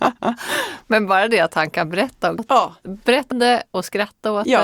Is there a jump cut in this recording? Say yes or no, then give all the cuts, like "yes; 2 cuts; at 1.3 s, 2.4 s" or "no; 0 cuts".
yes; 2 cuts; at 2.4 s, 3.3 s